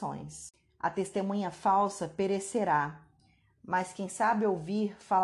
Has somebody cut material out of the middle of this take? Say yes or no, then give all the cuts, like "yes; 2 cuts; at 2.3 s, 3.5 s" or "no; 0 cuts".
no; 0 cuts